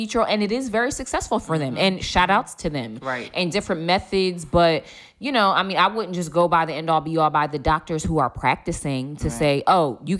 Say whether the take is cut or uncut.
uncut